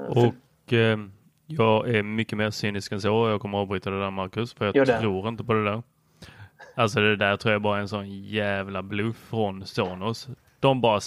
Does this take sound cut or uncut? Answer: uncut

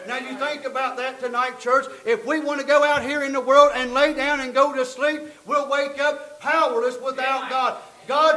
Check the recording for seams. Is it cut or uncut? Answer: uncut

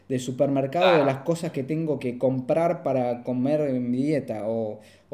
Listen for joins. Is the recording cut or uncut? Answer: uncut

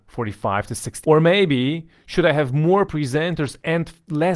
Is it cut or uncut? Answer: cut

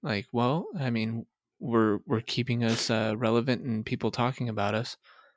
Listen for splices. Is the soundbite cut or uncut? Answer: uncut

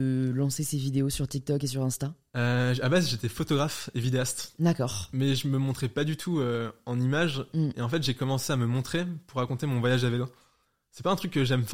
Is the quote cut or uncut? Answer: uncut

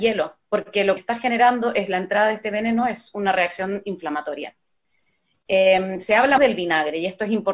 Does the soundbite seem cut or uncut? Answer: cut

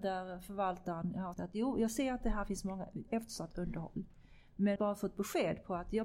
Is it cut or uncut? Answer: cut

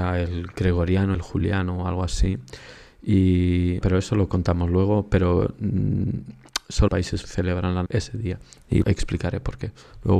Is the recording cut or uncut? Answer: cut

